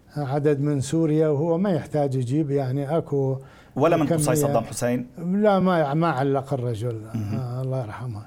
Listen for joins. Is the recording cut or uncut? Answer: uncut